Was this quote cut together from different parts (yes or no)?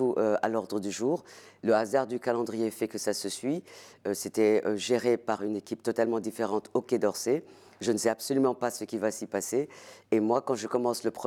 no